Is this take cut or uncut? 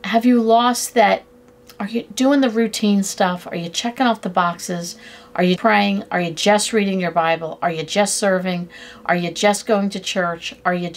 cut